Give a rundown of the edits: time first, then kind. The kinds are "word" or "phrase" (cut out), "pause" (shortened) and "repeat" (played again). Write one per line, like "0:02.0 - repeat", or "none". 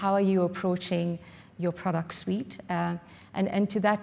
none